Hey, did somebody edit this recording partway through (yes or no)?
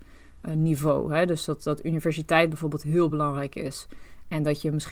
no